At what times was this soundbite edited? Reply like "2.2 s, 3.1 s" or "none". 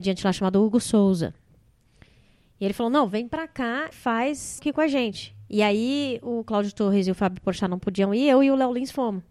3.9 s, 4.6 s